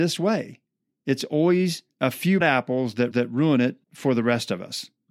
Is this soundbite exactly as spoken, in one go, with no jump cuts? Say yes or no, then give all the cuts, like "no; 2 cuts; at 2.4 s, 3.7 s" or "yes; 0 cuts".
no; 4 cuts; at 1.9 s, 2.4 s, 3.1 s, 3.8 s